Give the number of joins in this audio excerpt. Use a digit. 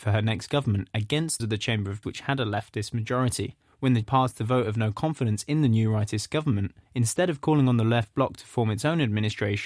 5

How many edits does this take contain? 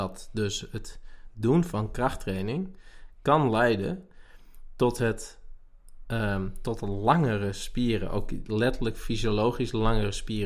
0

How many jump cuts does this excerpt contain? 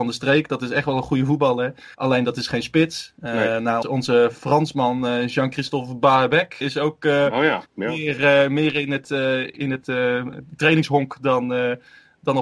4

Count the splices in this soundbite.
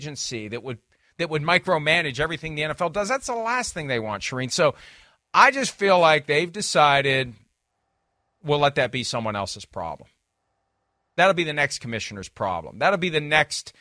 0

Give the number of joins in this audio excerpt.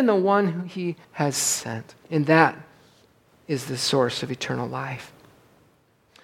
2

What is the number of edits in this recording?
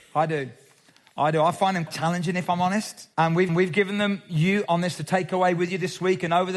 5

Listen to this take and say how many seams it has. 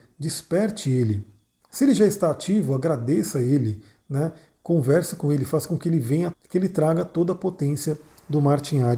1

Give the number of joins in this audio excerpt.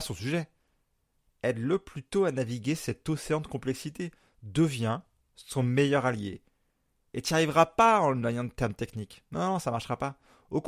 0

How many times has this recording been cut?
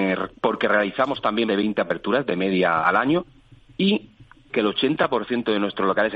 3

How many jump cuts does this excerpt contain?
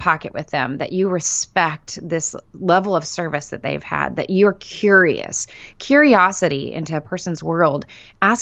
1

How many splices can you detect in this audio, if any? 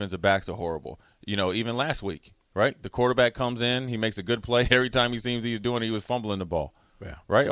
1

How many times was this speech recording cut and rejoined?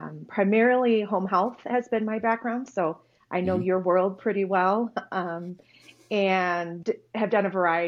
1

